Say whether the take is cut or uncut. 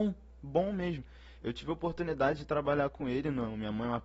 uncut